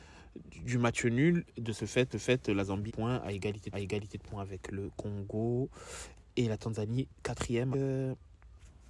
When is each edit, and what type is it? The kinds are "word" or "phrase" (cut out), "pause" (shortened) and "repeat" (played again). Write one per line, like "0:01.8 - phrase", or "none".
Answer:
0:02.1 - repeat
0:02.9 - phrase
0:03.7 - repeat
0:07.7 - word